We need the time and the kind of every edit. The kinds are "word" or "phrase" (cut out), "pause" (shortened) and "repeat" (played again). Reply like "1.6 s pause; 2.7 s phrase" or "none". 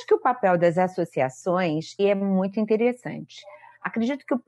2.0 s word